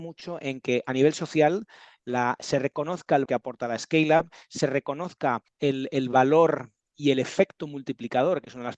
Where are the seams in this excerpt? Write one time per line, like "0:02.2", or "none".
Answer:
0:03.3
0:05.5